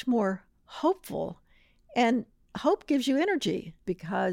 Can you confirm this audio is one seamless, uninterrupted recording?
yes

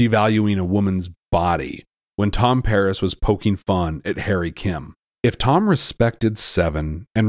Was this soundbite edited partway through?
no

